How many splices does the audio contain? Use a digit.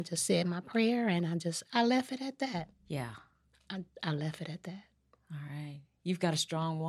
0